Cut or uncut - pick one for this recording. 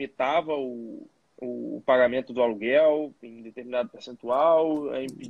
uncut